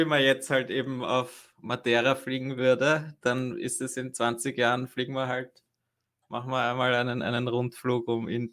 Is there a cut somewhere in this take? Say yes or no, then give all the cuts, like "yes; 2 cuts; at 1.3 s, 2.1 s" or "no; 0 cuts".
no; 0 cuts